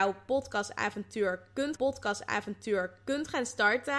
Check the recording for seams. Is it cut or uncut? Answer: cut